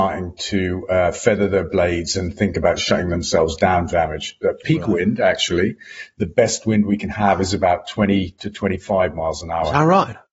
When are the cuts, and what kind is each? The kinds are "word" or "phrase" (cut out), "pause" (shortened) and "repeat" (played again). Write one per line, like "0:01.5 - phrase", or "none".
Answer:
0:03.9 - phrase